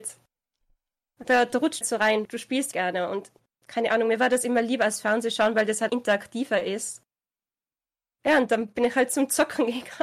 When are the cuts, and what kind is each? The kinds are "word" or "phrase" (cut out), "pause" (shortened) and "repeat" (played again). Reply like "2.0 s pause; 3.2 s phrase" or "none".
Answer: 1.8 s word; 2.2 s word; 2.7 s word; 5.9 s word